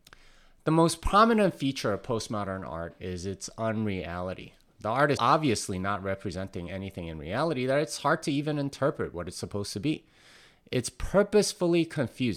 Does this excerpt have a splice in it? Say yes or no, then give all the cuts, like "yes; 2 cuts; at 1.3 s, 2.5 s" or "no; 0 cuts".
yes; 1 cut; at 5.2 s